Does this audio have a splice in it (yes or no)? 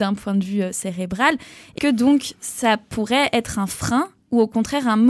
yes